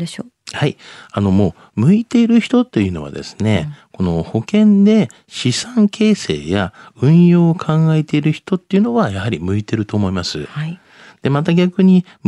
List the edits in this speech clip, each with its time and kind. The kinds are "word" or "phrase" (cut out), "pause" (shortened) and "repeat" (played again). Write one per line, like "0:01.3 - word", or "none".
none